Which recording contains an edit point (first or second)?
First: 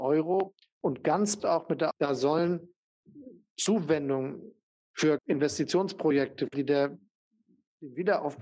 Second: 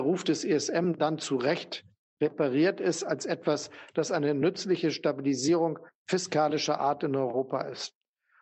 first